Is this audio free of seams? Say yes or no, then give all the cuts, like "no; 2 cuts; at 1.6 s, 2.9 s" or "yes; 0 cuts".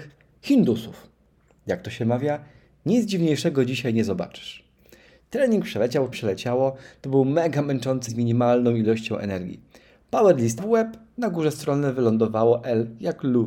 no; 3 cuts; at 6.1 s, 8.1 s, 10.6 s